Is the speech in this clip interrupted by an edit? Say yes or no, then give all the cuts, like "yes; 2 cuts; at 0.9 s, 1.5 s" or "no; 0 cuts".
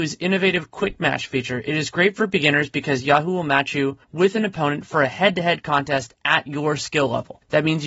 no; 0 cuts